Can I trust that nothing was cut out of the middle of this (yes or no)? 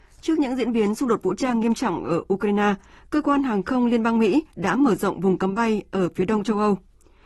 yes